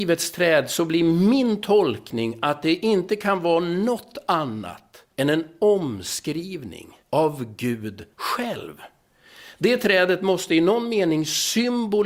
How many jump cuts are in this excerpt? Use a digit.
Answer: 3